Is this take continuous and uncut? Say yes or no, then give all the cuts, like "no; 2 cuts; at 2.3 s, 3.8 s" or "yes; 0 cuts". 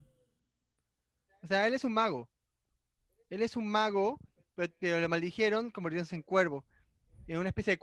yes; 0 cuts